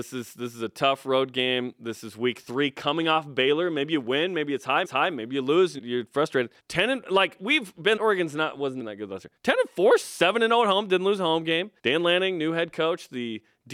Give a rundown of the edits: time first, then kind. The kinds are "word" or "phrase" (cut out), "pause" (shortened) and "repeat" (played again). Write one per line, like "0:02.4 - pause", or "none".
0:04.8 - repeat
0:05.8 - word
0:06.6 - pause
0:08.0 - word
0:08.8 - word
0:09.4 - pause
0:10.0 - word
0:11.8 - pause